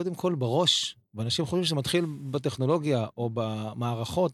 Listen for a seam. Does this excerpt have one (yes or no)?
no